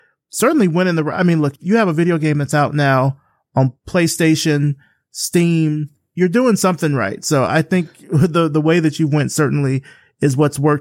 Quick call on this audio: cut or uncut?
uncut